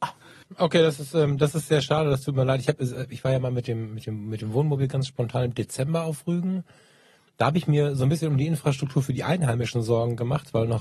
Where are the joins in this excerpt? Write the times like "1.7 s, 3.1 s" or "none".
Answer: none